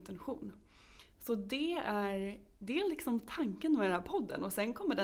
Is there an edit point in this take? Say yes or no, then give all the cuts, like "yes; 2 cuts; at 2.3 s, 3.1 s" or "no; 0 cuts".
no; 0 cuts